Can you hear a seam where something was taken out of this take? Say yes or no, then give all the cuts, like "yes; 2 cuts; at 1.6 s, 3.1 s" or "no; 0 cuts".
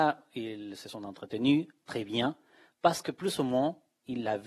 no; 0 cuts